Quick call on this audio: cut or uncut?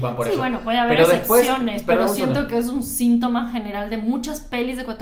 uncut